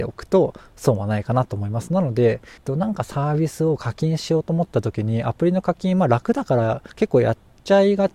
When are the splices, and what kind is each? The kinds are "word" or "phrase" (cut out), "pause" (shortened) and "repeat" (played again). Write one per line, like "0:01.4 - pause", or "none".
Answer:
0:02.6 - phrase
0:06.9 - pause